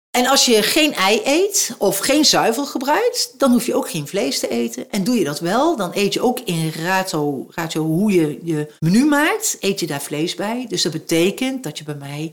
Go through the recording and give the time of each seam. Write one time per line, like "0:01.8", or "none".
0:08.8